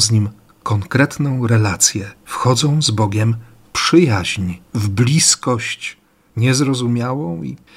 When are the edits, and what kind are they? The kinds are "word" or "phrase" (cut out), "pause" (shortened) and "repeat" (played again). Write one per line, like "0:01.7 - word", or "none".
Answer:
0:02.2 - pause
0:03.6 - word
0:04.7 - pause

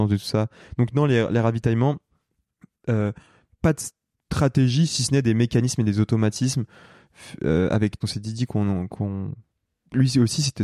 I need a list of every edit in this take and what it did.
0:08.0 - phrase

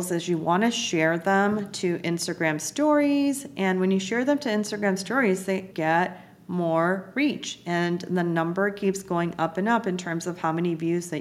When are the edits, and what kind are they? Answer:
0:05.7 - word

